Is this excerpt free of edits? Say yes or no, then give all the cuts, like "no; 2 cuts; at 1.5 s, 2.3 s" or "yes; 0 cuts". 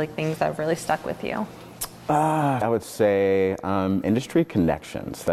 no; 1 cut; at 2.6 s